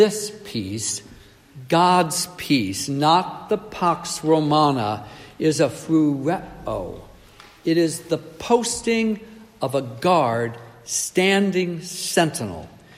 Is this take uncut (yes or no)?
yes